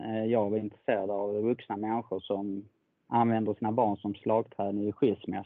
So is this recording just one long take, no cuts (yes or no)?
yes